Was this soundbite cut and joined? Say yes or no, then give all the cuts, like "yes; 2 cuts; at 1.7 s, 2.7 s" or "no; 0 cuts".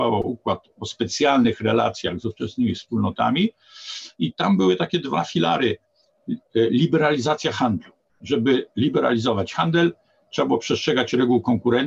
no; 0 cuts